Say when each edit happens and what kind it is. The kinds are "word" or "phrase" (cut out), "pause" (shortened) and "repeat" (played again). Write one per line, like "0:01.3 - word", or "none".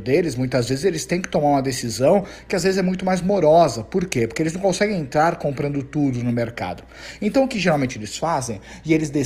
none